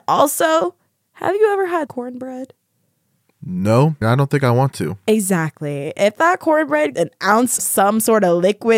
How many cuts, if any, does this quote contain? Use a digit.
4